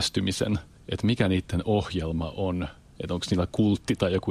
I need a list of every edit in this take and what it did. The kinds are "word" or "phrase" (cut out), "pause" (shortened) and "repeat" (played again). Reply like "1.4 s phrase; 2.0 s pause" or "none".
none